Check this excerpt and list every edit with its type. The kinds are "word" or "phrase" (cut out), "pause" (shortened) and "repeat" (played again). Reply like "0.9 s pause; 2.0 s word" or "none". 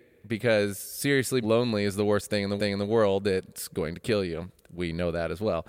1.4 s word; 2.6 s repeat